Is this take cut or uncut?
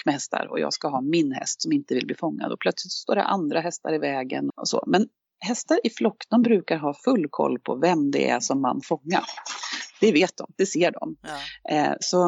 cut